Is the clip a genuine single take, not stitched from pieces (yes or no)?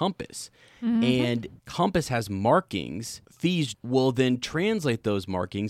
no